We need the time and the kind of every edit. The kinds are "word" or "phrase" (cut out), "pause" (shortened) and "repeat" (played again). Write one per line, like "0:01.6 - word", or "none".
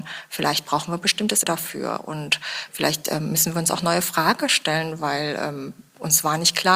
0:01.4 - word